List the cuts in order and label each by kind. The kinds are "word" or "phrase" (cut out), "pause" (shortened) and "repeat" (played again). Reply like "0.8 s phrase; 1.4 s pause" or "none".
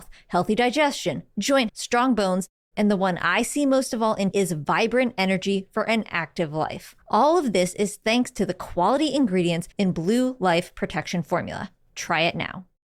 1.7 s word; 4.3 s word; 7.0 s pause; 9.7 s pause